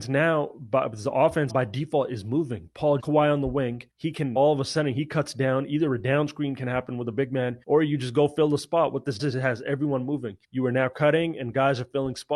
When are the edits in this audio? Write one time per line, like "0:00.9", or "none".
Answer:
0:01.5
0:03.0
0:03.9
0:04.4
0:07.6
0:09.2
0:10.4